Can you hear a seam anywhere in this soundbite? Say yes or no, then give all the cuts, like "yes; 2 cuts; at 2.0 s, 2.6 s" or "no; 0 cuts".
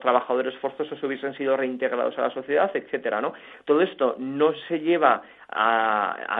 no; 0 cuts